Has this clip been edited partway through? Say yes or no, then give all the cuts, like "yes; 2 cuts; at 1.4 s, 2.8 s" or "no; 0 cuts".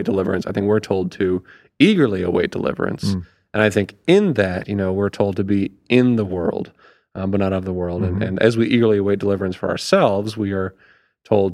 no; 0 cuts